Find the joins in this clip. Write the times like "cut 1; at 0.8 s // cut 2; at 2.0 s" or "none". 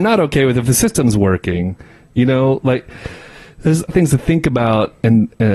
cut 1; at 3.9 s